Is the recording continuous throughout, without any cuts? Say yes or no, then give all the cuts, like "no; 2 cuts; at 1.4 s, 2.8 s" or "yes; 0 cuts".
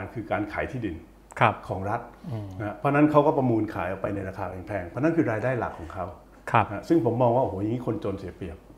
yes; 0 cuts